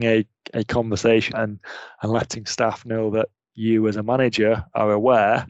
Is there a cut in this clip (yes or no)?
yes